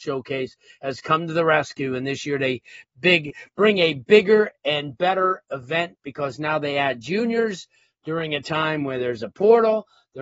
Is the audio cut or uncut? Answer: uncut